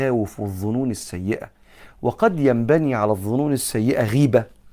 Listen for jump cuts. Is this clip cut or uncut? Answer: uncut